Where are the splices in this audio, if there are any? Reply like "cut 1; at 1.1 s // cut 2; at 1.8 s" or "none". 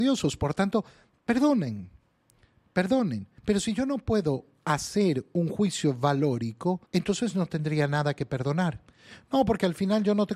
cut 1; at 3.4 s // cut 2; at 6.9 s